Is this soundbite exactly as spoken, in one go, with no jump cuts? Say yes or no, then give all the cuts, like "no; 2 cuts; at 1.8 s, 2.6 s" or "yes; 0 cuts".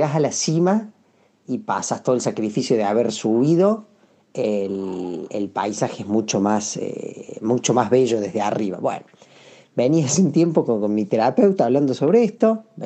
yes; 0 cuts